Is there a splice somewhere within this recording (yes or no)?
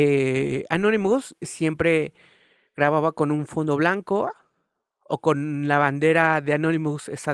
no